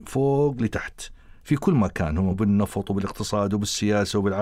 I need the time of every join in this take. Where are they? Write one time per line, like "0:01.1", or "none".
0:02.3

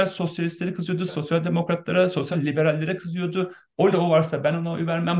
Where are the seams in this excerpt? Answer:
0:01.1
0:02.3
0:03.9

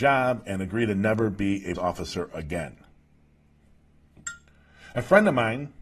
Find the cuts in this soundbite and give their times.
0:01.8

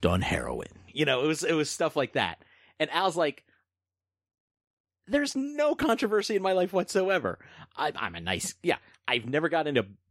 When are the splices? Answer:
none

